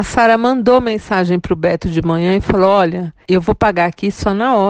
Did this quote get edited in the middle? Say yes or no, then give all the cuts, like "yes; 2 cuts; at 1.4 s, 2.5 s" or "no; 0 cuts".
yes; 1 cut; at 3.2 s